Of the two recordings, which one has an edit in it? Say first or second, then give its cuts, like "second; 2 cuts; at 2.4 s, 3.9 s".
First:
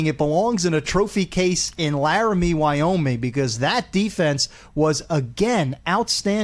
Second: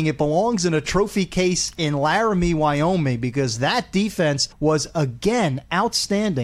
second; 1 cut; at 4.5 s